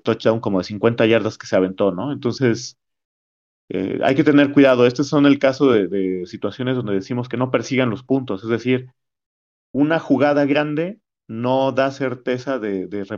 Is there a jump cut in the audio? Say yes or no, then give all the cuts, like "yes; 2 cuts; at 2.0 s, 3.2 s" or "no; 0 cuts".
no; 0 cuts